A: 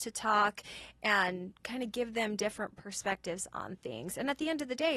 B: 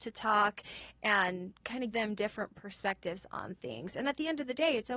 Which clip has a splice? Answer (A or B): B